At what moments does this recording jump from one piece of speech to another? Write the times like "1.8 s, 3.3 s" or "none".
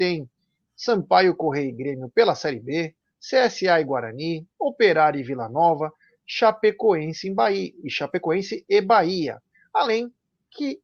none